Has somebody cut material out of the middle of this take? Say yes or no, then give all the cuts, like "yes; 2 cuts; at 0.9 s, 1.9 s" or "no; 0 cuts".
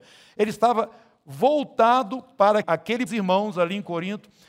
yes; 2 cuts; at 2.6 s, 3.1 s